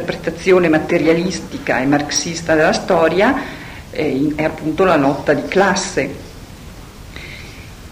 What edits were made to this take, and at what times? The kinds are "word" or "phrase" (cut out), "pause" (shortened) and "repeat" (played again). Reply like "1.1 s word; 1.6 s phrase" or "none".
4.4 s phrase